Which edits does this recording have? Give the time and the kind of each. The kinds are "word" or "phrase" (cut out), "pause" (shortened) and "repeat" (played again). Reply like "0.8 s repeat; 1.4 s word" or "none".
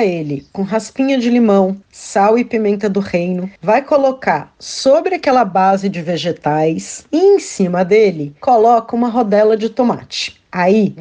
1.8 s pause; 3.6 s pause